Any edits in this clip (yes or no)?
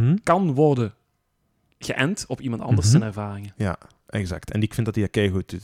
no